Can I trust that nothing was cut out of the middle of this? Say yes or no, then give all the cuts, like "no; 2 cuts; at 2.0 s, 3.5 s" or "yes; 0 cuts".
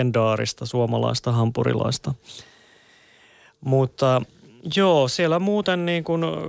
yes; 0 cuts